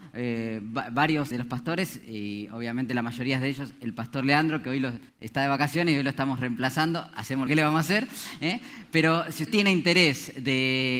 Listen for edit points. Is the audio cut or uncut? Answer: cut